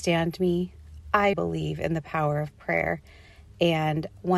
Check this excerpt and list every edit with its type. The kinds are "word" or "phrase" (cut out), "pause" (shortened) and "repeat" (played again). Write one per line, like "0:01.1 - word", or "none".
0:01.3 - word